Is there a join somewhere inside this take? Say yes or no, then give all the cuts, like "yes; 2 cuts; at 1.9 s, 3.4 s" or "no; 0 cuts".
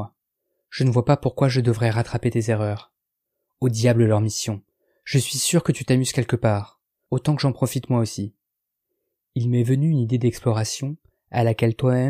no; 0 cuts